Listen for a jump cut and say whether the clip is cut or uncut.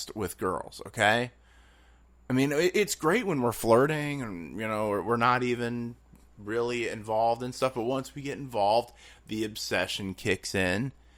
uncut